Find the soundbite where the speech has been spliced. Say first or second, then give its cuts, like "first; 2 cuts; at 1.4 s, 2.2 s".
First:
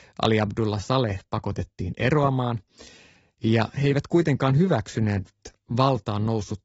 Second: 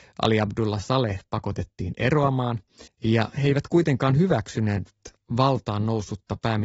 second; 1 cut; at 2.9 s